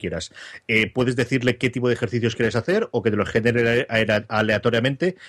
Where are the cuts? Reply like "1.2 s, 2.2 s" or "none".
none